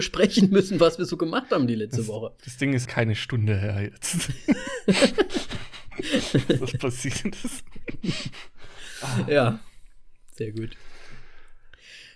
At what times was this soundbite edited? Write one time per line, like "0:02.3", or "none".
0:02.9